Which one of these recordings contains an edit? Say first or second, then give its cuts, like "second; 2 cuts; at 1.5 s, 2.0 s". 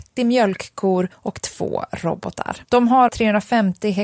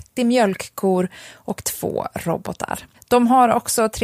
first; 3 cuts; at 1.1 s, 2.6 s, 3.1 s